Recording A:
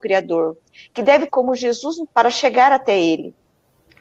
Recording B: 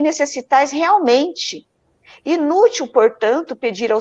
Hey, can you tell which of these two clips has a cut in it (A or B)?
A